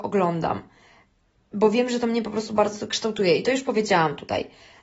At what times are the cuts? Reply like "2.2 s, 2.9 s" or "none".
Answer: none